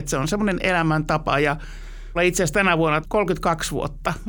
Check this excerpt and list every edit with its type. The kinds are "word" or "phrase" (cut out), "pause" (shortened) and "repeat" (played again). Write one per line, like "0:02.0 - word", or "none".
0:02.2 - word
0:03.0 - word

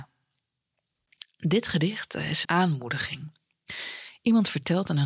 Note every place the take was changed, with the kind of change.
0:02.4 - word

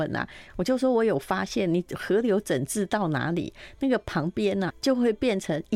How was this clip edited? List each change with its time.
0:04.7 - word

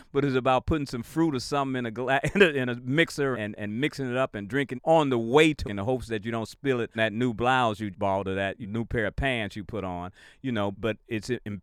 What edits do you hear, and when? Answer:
0:03.3 - word
0:04.7 - word
0:05.6 - word
0:06.9 - word
0:07.9 - word
0:08.6 - word
0:10.7 - word

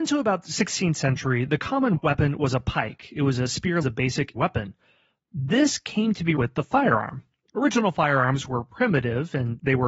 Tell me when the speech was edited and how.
0:03.8 - phrase
0:04.4 - word
0:06.4 - word

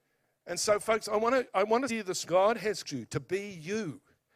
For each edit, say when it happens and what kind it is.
0:01.9 - word
0:02.3 - word
0:02.8 - word

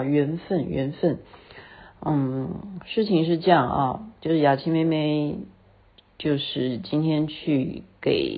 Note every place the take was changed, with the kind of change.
none

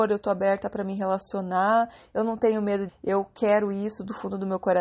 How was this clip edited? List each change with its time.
0:02.9 - word

